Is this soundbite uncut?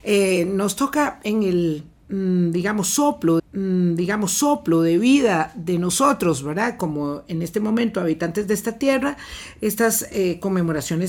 no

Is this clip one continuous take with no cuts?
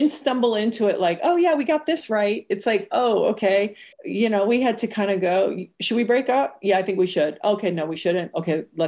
no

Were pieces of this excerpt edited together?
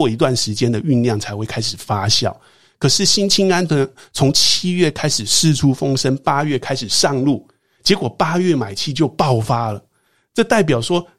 no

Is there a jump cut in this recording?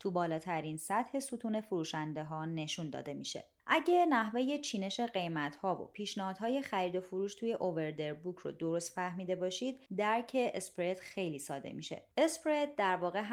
yes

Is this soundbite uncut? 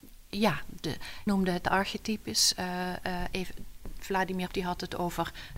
no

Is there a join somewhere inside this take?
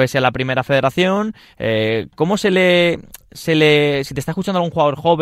no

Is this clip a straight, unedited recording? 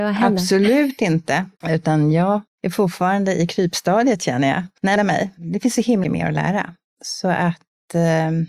no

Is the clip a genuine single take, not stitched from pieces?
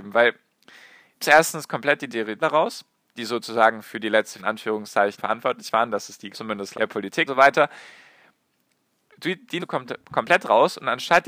no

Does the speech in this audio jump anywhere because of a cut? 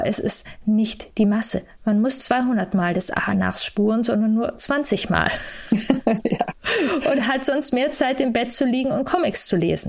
yes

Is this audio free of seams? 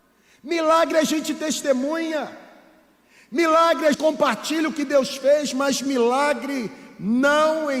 no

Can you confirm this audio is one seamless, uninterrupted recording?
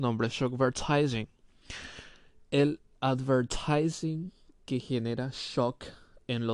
yes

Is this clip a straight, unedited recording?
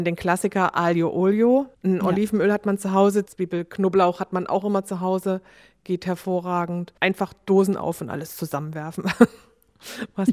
no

